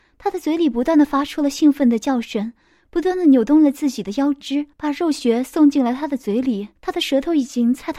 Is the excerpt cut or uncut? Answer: cut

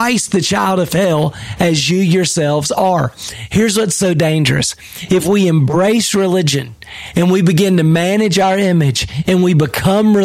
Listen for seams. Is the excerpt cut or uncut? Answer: uncut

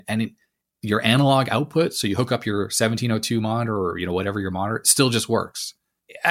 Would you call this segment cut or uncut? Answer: uncut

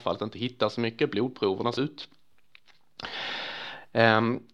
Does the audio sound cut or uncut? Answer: cut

